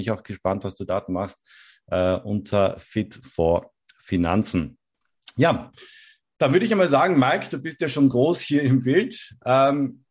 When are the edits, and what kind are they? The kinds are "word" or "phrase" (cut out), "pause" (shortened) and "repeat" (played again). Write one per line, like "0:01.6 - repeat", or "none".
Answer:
none